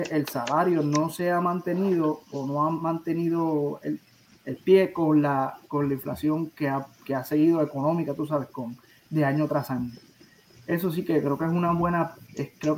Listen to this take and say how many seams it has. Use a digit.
0